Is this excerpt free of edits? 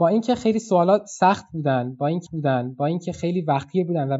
no; 1 cut; at 2.3 s

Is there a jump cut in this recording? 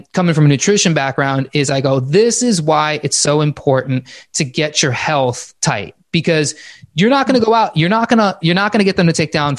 yes; 2 cuts; at 5.6 s, 8.4 s

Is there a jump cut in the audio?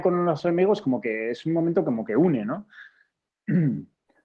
no; 0 cuts

